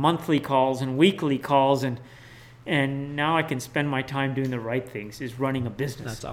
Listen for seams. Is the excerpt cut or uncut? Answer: uncut